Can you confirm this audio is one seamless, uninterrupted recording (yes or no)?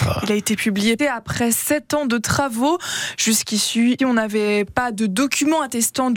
no